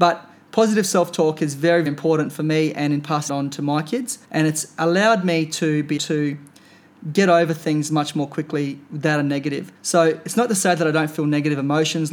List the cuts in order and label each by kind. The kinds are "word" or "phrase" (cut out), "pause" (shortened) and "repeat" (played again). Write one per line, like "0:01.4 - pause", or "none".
0:01.9 - word
0:03.3 - word
0:04.2 - pause
0:06.0 - word
0:09.8 - pause